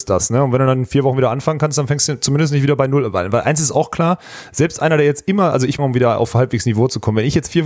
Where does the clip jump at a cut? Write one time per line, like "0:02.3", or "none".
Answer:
0:05.8